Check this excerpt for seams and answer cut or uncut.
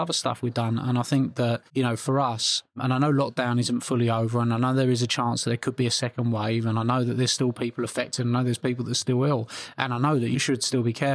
cut